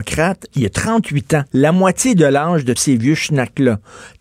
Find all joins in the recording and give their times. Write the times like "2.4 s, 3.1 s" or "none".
1.5 s, 2.8 s